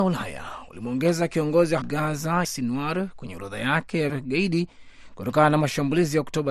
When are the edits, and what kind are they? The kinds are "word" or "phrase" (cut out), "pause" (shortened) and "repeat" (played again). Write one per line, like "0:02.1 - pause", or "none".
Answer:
0:01.8 - word
0:02.4 - word
0:04.1 - word